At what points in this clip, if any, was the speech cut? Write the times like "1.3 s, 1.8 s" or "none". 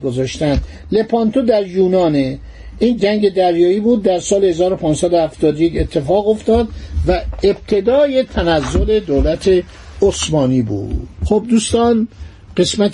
3.0 s